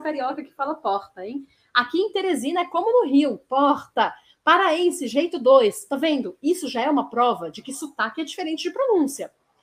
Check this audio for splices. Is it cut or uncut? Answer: uncut